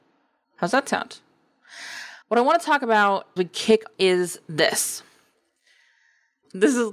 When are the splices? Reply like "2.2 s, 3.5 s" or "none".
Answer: 2.2 s, 3.4 s, 3.9 s